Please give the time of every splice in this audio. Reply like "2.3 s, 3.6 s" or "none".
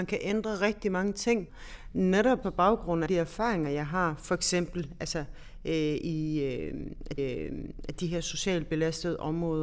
2.4 s, 3.1 s, 7.2 s